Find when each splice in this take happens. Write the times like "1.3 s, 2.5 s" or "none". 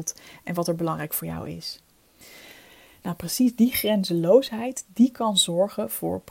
none